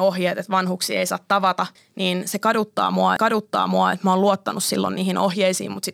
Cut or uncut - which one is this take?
cut